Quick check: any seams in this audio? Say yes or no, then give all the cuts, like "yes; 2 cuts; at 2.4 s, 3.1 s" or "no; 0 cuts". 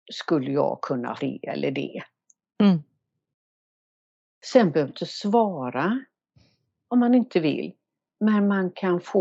yes; 2 cuts; at 1.2 s, 4.9 s